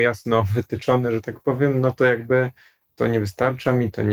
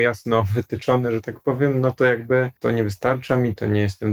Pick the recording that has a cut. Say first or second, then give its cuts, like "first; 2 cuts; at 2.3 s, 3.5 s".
second; 1 cut; at 2.6 s